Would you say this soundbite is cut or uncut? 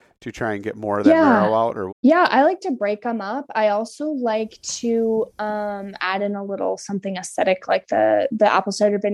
cut